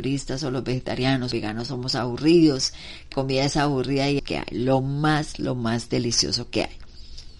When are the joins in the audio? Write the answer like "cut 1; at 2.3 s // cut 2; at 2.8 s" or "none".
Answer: cut 1; at 1.3 s // cut 2; at 3.1 s // cut 3; at 4.2 s